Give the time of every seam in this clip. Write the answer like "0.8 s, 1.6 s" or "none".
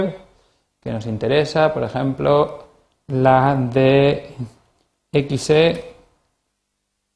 none